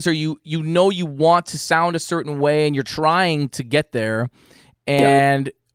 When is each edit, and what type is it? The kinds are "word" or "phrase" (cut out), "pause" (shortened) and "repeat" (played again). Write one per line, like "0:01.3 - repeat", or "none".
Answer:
none